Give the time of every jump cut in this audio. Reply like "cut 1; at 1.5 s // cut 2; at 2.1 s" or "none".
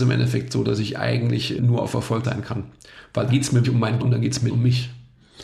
cut 1; at 1.6 s // cut 2; at 2.2 s // cut 3; at 3.3 s // cut 4; at 3.6 s // cut 5; at 4.0 s // cut 6; at 4.5 s